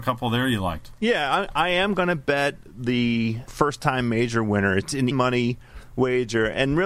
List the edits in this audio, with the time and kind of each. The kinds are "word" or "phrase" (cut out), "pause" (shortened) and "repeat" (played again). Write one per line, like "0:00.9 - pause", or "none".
0:03.5 - word
0:05.1 - word